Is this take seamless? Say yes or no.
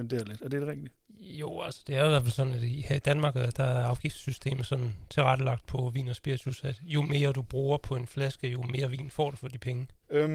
yes